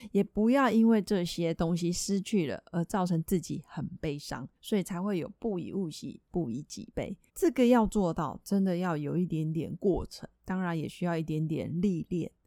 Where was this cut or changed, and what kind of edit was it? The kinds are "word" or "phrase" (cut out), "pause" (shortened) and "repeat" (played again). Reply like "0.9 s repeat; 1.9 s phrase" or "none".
4.6 s pause; 7.3 s pause; 10.3 s pause